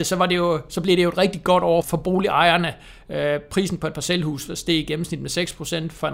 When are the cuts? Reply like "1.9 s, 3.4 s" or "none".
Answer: 1.8 s